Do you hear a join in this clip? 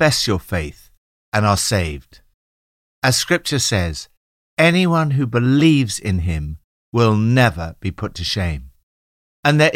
no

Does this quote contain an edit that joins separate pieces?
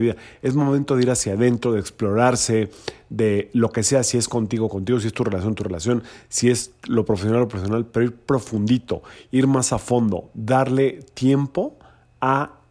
no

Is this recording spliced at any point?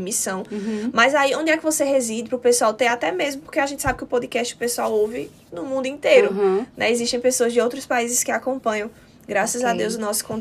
no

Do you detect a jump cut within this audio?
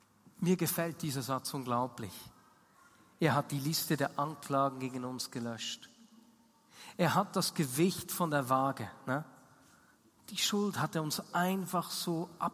no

